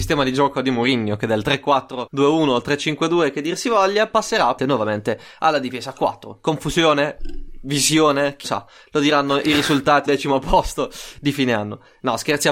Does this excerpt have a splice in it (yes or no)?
yes